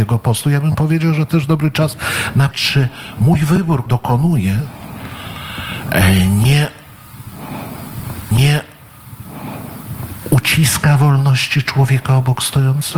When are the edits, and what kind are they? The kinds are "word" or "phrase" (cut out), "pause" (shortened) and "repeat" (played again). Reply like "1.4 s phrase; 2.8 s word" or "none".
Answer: 1.3 s word; 2.5 s word; 3.9 s word; 8.3 s repeat